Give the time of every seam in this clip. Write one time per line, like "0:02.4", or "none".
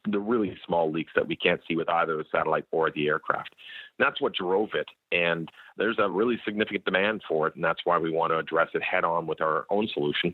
none